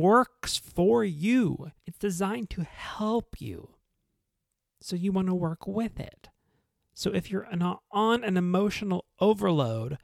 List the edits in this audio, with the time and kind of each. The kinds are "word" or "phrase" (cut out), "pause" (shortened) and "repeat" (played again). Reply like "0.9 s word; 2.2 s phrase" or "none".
1.8 s pause